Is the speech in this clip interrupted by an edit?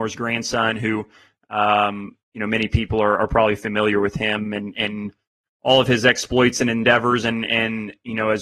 no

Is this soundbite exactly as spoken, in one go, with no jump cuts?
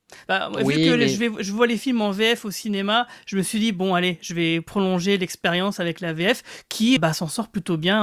no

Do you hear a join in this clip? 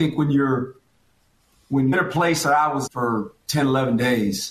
yes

